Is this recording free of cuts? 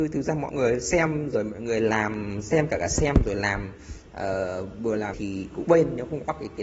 no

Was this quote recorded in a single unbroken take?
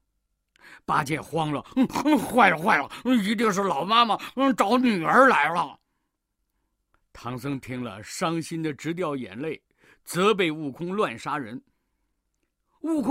yes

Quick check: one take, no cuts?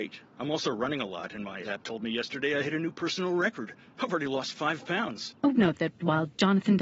no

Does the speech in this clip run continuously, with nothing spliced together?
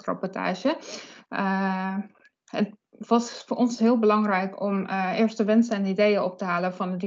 yes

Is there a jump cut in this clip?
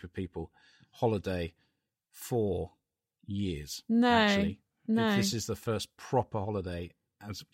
no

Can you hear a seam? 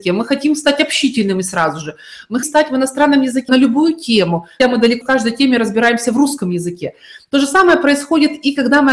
yes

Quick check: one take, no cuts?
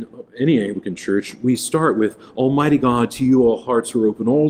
yes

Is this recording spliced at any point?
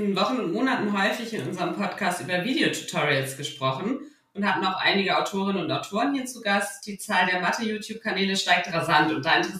no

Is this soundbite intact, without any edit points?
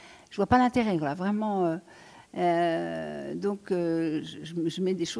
yes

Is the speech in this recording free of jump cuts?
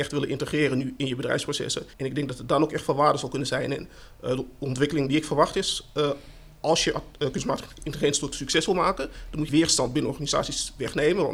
no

